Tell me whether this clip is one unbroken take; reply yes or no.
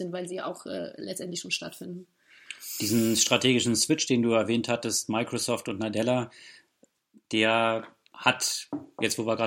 yes